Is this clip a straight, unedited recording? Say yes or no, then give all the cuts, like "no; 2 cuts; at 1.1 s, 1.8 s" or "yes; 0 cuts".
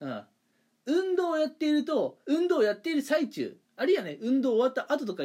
no; 2 cuts; at 2.2 s, 3.6 s